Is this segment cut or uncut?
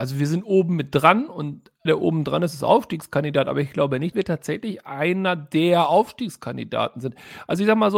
cut